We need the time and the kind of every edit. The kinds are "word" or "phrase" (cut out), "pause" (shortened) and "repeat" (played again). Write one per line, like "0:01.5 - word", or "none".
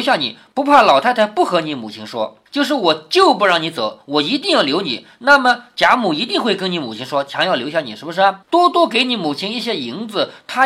0:02.5 - pause
0:08.4 - pause